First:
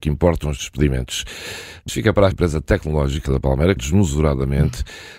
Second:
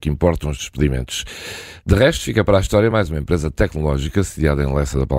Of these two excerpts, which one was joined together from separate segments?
first; 4 cuts; at 1.9 s, 2.3 s, 3.2 s, 3.8 s

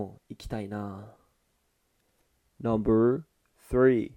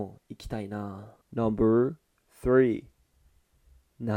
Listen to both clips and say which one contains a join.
second; 1 cut; at 1.2 s

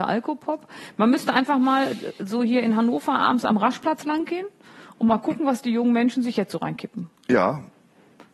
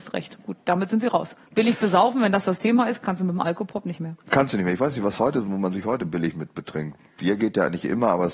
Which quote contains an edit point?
first; 1 cut; at 7.2 s

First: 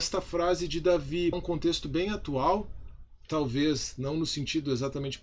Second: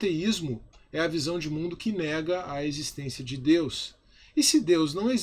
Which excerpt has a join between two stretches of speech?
first; 1 cut; at 1.3 s

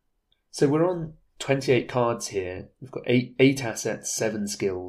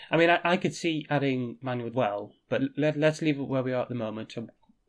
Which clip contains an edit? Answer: second; 2 cuts; at 1.6 s, 1.9 s

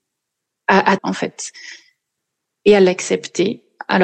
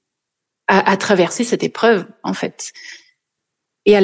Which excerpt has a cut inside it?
first; 1 cut; at 1.0 s

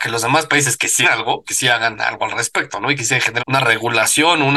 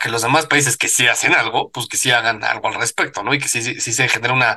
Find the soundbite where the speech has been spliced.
first; 4 cuts; at 1.0 s, 1.4 s, 3.0 s, 3.4 s

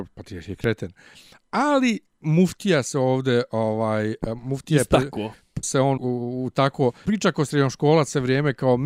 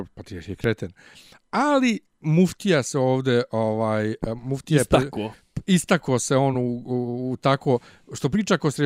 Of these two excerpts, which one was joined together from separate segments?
first; 3 cuts; at 5.6 s, 6.0 s, 7.1 s

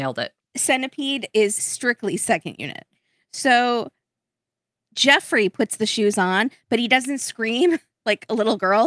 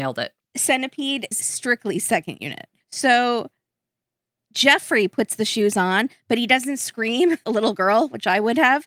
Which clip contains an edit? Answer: second; 3 cuts; at 1.3 s, 2.8 s, 7.4 s

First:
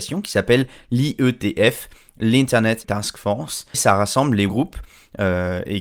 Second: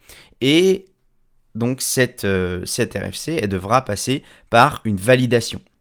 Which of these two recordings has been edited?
first; 3 cuts; at 2.8 s, 3.7 s, 4.5 s

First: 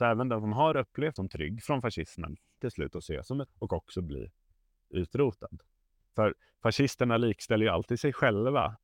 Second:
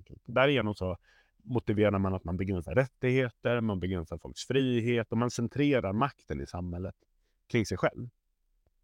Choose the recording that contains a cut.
first; 3 cuts; at 1.2 s, 2.6 s, 3.5 s

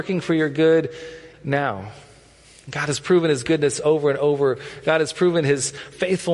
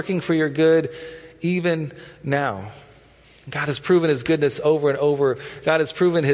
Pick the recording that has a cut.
first; 1 cut; at 1.3 s

